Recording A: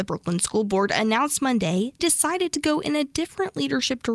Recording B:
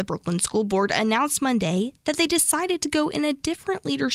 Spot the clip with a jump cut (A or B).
A